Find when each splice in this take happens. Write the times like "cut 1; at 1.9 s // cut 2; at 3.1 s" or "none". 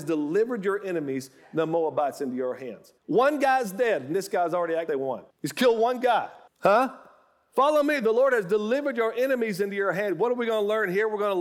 cut 1; at 3.0 s // cut 2; at 4.9 s // cut 3; at 5.3 s // cut 4; at 6.5 s

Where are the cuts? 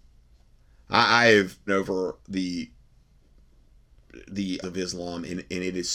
cut 1; at 1.7 s // cut 2; at 4.6 s

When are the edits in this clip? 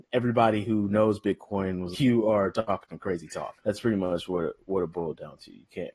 cut 1; at 1.9 s // cut 2; at 3.6 s

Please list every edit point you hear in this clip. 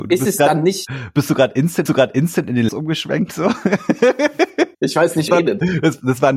cut 1; at 1.9 s // cut 2; at 2.7 s // cut 3; at 4.7 s // cut 4; at 5.3 s

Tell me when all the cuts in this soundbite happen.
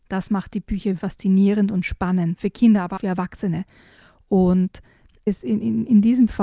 cut 1; at 1.0 s // cut 2; at 2.4 s // cut 3; at 3.0 s // cut 4; at 5.3 s

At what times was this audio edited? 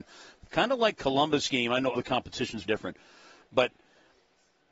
cut 1; at 1.0 s // cut 2; at 1.9 s // cut 3; at 2.6 s

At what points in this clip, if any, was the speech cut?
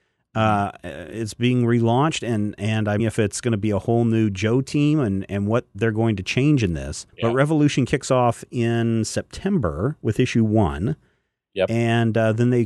cut 1; at 3.0 s // cut 2; at 7.1 s

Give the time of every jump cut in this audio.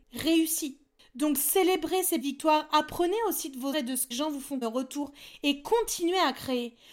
cut 1; at 2.2 s // cut 2; at 3.7 s // cut 3; at 4.1 s // cut 4; at 4.6 s

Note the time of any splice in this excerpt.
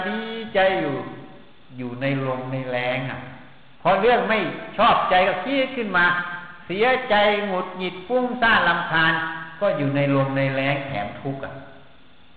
cut 1; at 3.8 s

